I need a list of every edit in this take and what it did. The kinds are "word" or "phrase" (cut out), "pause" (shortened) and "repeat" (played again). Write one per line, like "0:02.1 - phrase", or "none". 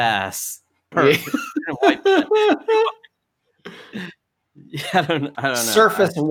0:00.9 - word
0:05.3 - word